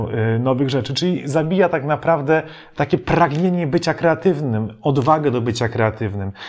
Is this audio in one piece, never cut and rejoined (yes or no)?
yes